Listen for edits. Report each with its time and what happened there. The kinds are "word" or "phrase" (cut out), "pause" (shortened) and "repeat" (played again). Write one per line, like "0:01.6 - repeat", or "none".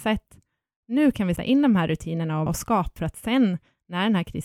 0:01.4 - word
0:02.5 - word
0:03.0 - word